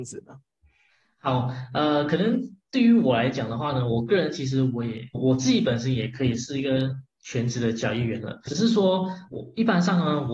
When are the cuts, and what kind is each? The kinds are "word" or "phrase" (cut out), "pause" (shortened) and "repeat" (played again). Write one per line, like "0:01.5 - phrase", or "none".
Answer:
0:05.1 - phrase
0:08.5 - word
0:09.3 - word